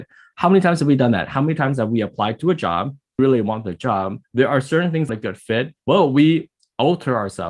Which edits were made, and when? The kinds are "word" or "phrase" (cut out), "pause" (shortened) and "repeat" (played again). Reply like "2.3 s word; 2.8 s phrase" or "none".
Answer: 3.2 s word; 4.2 s pause; 5.1 s phrase; 5.8 s pause